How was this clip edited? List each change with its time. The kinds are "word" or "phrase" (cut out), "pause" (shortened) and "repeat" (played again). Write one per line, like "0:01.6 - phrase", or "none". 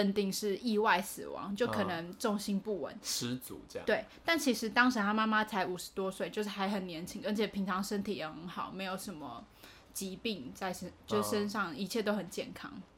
none